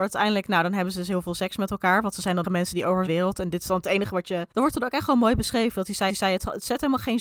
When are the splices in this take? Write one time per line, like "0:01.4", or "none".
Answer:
0:02.4
0:03.1
0:04.5
0:06.1